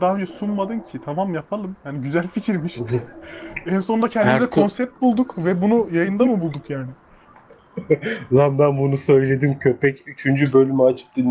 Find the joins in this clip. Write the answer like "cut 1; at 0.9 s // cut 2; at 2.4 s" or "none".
none